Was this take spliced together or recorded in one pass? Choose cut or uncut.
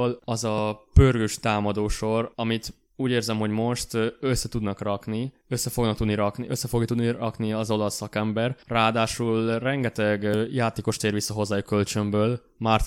uncut